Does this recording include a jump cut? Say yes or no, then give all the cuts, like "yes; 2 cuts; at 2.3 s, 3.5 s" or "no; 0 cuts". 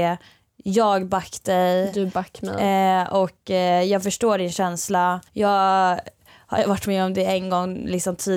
yes; 1 cut; at 5.3 s